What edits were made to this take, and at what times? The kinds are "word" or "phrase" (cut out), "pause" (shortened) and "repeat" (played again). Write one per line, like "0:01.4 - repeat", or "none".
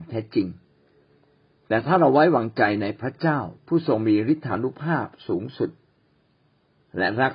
0:03.6 - pause